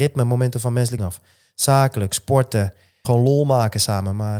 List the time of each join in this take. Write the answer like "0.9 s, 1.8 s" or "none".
1.0 s, 3.0 s